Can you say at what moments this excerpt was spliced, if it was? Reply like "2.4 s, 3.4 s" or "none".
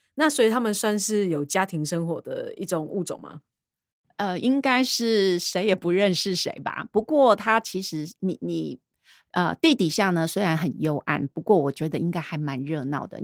none